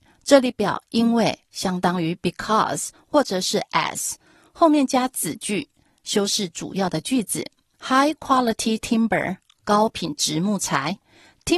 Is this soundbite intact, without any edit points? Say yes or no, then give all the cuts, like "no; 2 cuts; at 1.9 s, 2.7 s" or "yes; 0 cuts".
yes; 0 cuts